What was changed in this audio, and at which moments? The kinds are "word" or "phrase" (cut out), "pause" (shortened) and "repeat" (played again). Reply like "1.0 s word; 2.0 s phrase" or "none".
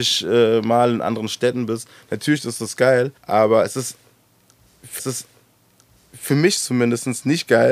3.2 s pause; 5.0 s repeat